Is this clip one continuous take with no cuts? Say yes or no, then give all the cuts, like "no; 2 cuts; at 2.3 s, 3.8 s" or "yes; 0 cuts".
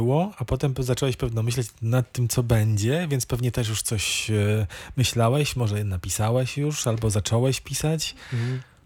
yes; 0 cuts